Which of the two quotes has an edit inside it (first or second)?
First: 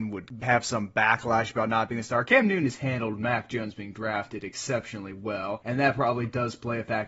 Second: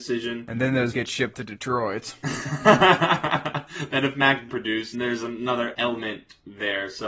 second